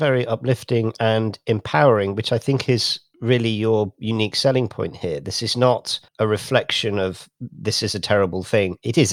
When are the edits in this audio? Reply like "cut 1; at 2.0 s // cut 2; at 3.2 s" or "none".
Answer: cut 1; at 6.1 s